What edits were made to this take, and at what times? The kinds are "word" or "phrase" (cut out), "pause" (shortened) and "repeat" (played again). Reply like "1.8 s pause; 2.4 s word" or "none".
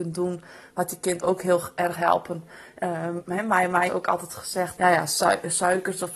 1.9 s word; 3.9 s word; 4.8 s word